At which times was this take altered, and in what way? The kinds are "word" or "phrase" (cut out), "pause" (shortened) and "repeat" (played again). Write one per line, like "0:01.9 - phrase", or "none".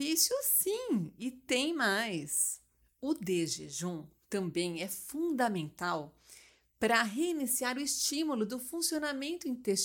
none